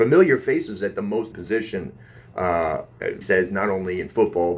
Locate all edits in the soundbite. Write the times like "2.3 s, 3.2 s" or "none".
1.3 s, 3.2 s